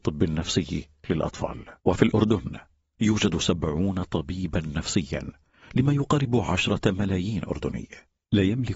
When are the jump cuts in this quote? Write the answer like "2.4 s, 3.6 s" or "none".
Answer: 1.8 s